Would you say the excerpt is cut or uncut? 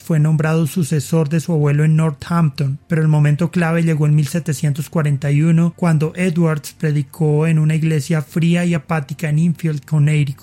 uncut